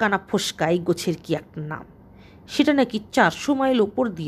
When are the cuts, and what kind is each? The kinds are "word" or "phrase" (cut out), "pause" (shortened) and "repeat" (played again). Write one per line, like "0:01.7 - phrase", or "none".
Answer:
none